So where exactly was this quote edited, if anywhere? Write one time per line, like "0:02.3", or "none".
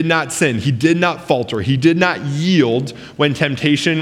none

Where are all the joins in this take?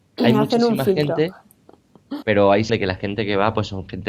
0:02.2
0:02.7

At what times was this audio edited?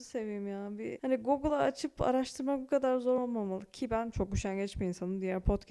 none

